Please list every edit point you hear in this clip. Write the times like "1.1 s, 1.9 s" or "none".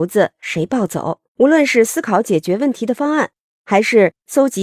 1.3 s

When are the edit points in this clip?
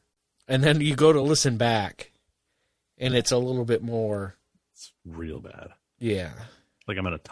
none

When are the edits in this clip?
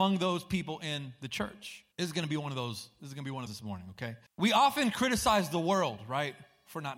1.9 s, 3.5 s, 4.3 s

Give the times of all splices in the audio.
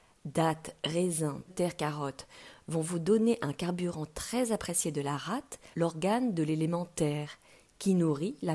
1.5 s, 5.7 s

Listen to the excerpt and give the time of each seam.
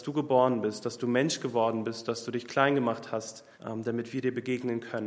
3.5 s

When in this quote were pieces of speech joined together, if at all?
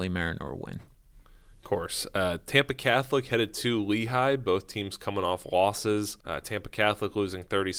6.2 s

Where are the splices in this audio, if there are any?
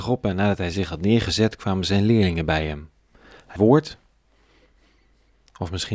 3.6 s

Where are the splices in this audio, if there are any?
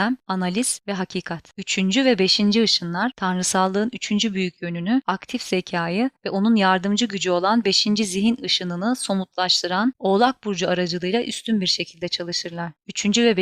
6.2 s

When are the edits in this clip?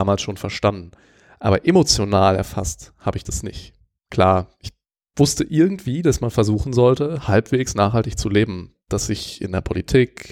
none

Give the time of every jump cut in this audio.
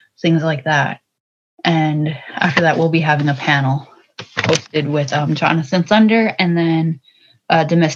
none

